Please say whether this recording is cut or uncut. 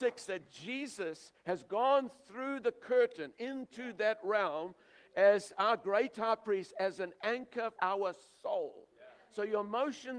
cut